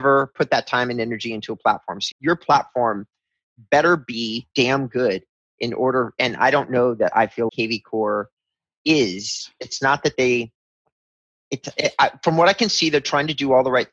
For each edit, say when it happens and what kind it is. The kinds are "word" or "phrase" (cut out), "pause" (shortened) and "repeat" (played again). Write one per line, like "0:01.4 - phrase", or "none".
0:02.1 - word
0:04.5 - pause
0:07.5 - word